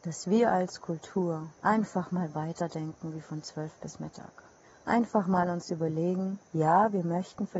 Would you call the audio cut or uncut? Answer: cut